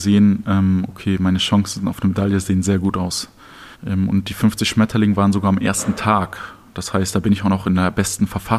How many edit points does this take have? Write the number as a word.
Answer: one